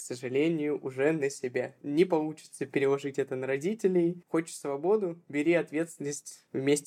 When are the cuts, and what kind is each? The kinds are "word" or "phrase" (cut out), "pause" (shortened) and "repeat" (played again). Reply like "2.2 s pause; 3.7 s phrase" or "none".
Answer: none